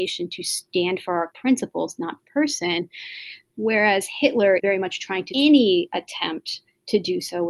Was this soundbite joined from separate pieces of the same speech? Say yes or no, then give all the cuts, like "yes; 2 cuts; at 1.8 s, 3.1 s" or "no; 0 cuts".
yes; 4 cuts; at 1.3 s, 2.2 s, 4.6 s, 5.3 s